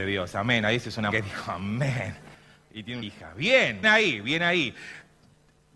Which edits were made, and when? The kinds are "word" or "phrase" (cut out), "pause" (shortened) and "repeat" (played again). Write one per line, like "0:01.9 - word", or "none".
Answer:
0:01.1 - word
0:03.0 - word
0:03.8 - word